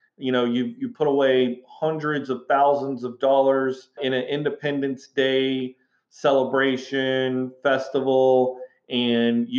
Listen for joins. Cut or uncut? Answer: cut